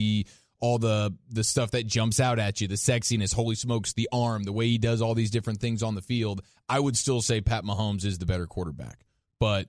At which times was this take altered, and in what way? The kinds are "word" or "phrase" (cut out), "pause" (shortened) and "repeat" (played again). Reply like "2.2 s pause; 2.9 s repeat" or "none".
none